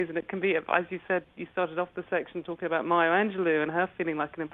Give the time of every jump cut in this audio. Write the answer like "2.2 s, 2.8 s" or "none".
none